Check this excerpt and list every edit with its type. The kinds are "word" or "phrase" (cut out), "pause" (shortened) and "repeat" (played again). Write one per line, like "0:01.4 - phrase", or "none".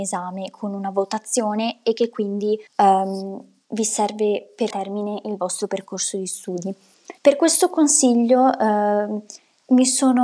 0:02.7 - pause
0:04.7 - phrase
0:07.2 - pause